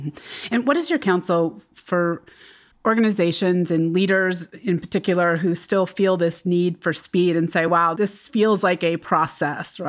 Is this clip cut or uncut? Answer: uncut